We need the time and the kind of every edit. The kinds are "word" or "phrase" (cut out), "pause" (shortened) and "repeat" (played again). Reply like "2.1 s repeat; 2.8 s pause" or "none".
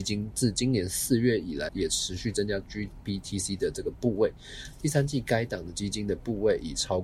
1.7 s word